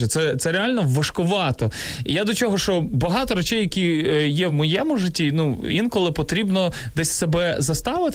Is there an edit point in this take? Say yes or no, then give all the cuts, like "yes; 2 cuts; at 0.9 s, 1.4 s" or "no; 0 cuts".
no; 0 cuts